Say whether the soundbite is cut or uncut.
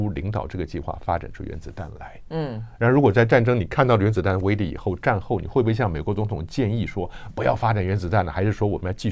uncut